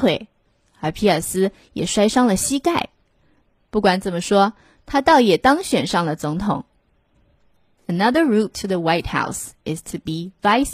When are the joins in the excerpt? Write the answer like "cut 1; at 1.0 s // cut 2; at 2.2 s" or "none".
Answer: none